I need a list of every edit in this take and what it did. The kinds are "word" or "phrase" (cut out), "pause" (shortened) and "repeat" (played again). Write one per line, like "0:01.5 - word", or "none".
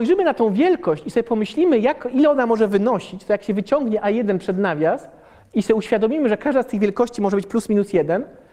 none